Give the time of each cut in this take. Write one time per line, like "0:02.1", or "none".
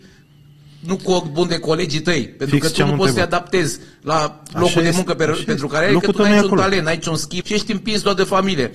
0:07.4